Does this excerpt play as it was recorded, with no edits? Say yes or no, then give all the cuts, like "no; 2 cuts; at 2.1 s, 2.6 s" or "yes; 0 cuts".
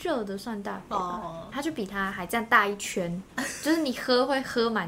no; 1 cut; at 1.5 s